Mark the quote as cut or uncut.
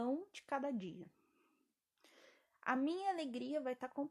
uncut